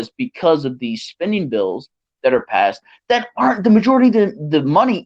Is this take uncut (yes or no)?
yes